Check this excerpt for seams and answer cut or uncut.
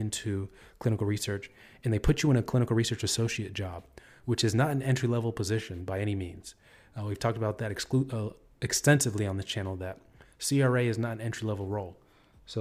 uncut